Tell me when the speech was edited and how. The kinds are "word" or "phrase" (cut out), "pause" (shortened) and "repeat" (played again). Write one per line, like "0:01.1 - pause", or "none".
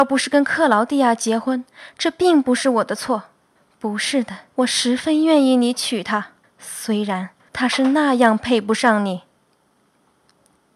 0:03.6 - pause
0:04.5 - phrase
0:06.4 - pause
0:07.5 - pause